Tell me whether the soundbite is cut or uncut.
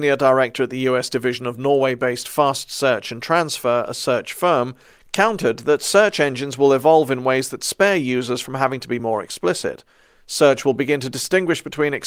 uncut